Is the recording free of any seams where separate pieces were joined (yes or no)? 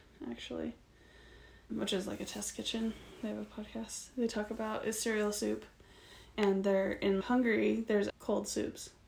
no